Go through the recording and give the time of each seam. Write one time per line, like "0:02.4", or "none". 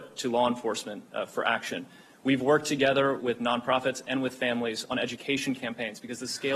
none